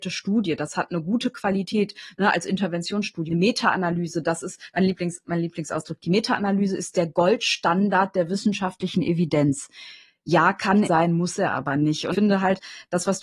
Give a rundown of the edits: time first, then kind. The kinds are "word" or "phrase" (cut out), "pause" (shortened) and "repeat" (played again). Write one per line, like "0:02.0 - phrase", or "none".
0:03.3 - word
0:10.8 - word
0:12.1 - word

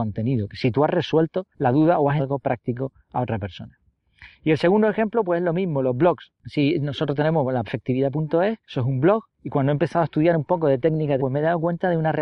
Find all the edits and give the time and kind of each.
0:01.5 - pause
0:02.2 - word
0:03.0 - pause
0:06.4 - pause
0:07.6 - word
0:08.6 - pause
0:09.3 - pause
0:11.2 - phrase

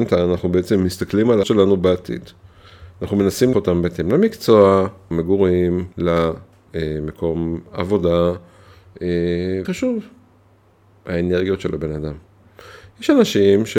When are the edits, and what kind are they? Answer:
0:01.4 - word
0:03.5 - word
0:05.1 - word
0:05.9 - pause
0:09.6 - word

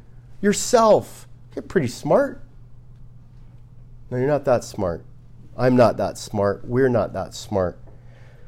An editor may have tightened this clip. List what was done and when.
none

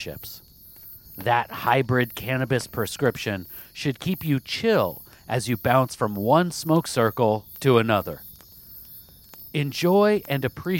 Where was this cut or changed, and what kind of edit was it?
0:01.1 - pause

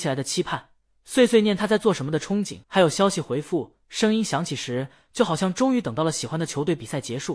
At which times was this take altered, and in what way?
0:02.6 - pause

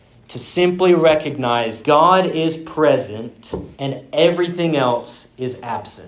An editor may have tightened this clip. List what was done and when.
0:01.8 - phrase
0:03.7 - pause

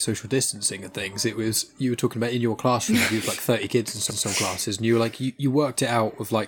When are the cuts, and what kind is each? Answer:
0:04.1 - repeat

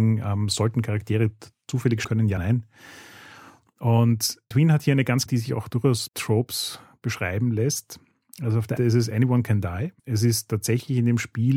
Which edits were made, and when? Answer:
0:02.0 - word
0:02.4 - word
0:04.5 - word
0:05.3 - phrase
0:06.1 - word
0:08.8 - phrase
0:10.0 - pause

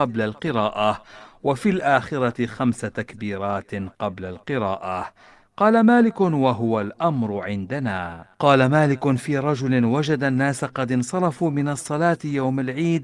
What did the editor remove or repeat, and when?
0:08.3 - pause

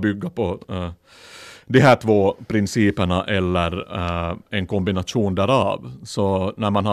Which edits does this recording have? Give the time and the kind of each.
none

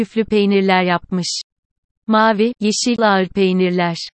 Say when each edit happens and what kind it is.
0:02.5 - word
0:03.0 - phrase

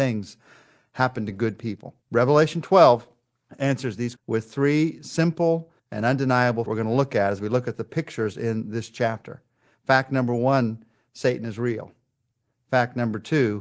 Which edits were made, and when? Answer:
0:02.0 - pause
0:04.2 - word
0:05.8 - pause
0:06.7 - phrase

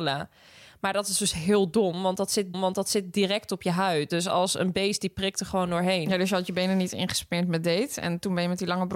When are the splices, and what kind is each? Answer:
0:02.5 - repeat

